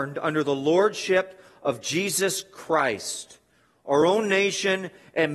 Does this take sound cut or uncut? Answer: uncut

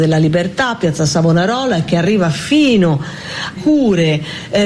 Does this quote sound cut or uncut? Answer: cut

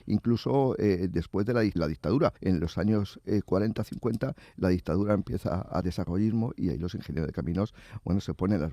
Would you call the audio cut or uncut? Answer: cut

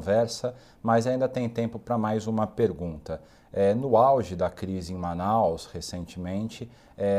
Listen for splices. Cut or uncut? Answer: uncut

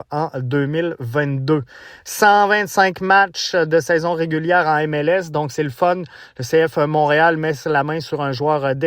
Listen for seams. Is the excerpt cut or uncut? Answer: uncut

